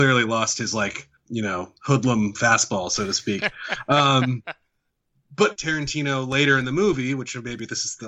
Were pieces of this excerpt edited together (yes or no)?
yes